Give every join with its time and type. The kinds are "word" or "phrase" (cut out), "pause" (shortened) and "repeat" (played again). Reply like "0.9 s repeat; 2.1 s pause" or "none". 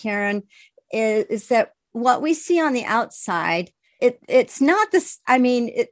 4.0 s word